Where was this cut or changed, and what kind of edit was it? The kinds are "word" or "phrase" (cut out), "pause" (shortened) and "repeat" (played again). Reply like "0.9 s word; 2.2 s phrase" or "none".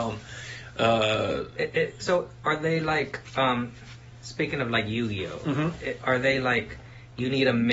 none